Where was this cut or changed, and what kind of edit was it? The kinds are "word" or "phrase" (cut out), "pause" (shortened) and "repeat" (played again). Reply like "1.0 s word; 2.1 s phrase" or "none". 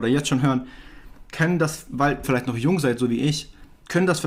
2.2 s word